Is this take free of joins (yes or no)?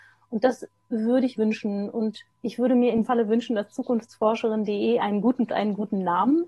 no